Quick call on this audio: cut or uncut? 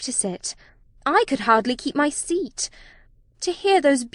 uncut